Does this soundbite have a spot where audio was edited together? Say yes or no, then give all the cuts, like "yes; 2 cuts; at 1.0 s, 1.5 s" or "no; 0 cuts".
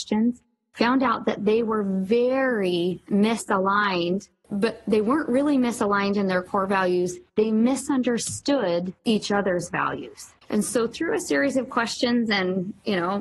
yes; 1 cut; at 10.4 s